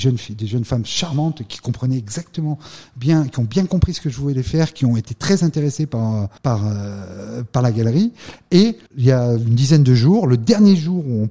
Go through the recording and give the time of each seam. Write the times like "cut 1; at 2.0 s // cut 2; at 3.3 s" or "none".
cut 1; at 6.4 s // cut 2; at 8.9 s

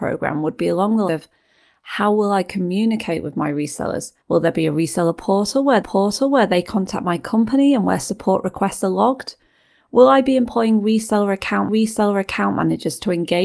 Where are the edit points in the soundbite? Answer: cut 1; at 1.1 s // cut 2; at 4.2 s // cut 3; at 5.8 s // cut 4; at 11.7 s

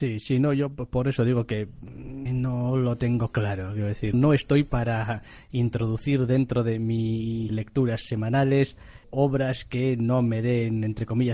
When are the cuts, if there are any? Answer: cut 1; at 2.3 s // cut 2; at 4.1 s // cut 3; at 7.5 s // cut 4; at 9.0 s

